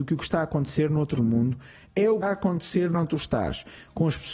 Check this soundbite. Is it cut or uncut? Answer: cut